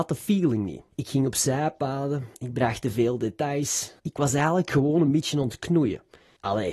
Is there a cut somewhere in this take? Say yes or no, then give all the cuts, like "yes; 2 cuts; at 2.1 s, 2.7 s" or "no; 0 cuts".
yes; 3 cuts; at 0.9 s, 2.3 s, 4.0 s